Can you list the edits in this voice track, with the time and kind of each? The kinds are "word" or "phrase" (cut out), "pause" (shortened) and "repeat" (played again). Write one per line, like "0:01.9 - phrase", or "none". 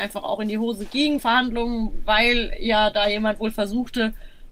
0:01.2 - word

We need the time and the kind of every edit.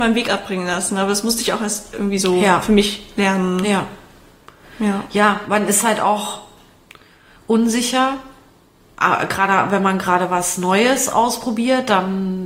none

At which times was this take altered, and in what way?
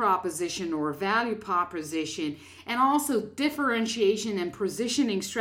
none

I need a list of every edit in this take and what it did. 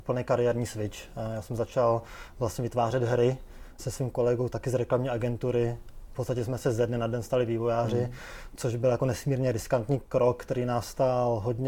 0:03.8 - word

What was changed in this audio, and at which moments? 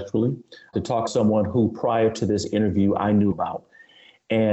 0:01.1 - word
0:03.3 - word

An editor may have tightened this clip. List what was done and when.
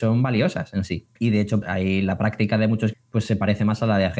0:01.2 - pause
0:01.6 - word
0:02.9 - word

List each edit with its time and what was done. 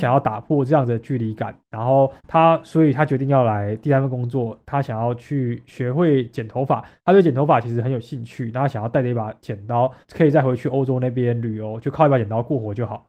0:02.2 - pause
0:10.0 - pause

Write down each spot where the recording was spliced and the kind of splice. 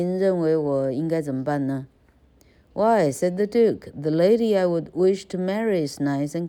none

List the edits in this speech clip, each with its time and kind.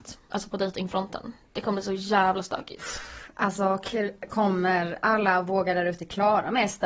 none

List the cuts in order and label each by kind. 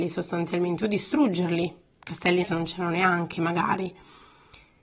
0:01.9 - pause
0:02.4 - word

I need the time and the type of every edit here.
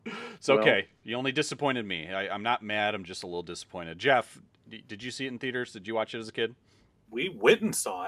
none

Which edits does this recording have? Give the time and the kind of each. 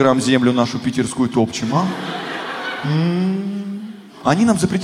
none

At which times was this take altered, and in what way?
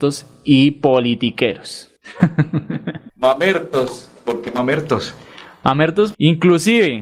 0:06.1 - word

